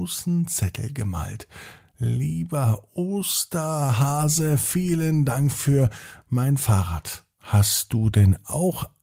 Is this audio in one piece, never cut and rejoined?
no; 1 cut; at 7.3 s

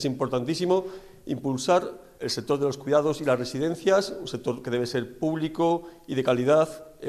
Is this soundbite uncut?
yes; 0 cuts

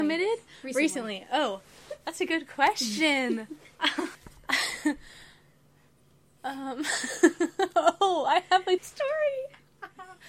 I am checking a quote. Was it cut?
yes; 2 cuts; at 4.1 s, 8.8 s

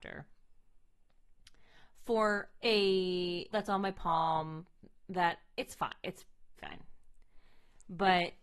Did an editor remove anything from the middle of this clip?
yes; 2 cuts; at 3.5 s, 6.6 s

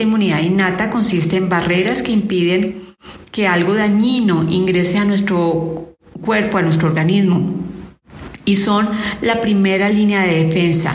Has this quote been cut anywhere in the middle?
no; 0 cuts

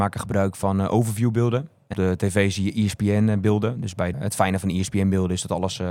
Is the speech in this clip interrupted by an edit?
yes; 2 cuts; at 1.9 s, 4.1 s

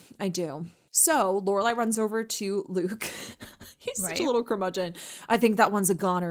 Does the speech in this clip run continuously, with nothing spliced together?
yes; 0 cuts

